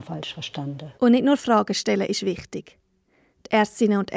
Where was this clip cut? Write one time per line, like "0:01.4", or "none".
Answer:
0:01.0